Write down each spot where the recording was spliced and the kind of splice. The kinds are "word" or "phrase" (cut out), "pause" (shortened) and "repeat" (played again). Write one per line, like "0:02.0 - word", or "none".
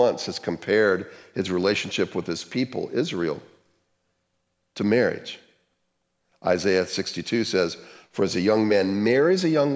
none